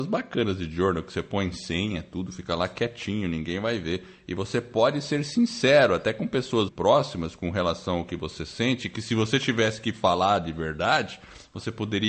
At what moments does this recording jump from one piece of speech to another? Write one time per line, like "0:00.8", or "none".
0:06.7